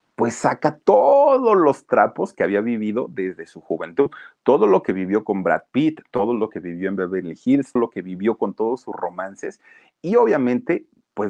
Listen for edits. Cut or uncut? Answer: cut